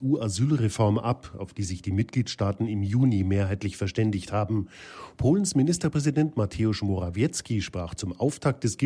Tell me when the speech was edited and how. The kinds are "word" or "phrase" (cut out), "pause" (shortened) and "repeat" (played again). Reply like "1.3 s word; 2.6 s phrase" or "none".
none

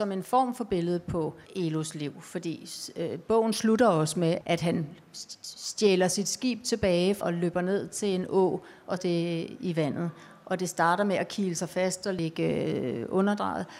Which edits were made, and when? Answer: 1.5 s pause; 4.4 s word; 7.2 s word; 9.0 s word

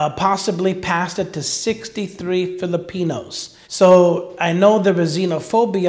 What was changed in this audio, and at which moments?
3.6 s pause

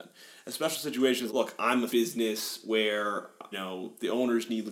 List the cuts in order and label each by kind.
1.3 s word; 1.9 s word; 3.5 s word

